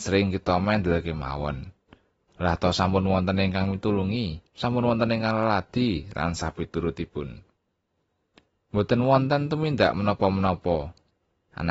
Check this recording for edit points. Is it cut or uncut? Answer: cut